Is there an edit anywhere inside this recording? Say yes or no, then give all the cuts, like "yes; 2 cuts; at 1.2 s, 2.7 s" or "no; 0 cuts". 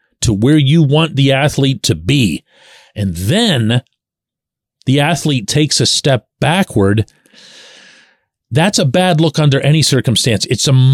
no; 0 cuts